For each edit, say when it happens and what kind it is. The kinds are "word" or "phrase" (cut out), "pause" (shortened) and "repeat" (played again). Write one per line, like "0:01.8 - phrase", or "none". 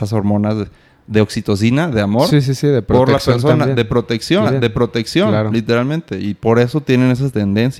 0:04.4 - repeat